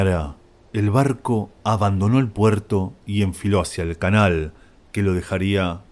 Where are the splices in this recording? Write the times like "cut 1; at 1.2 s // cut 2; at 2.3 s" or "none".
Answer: none